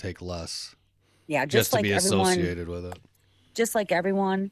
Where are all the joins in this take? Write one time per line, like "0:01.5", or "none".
none